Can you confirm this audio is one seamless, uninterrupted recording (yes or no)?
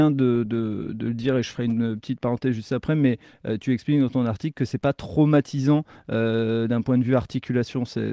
yes